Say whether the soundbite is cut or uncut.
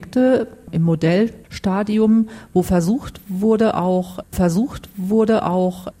cut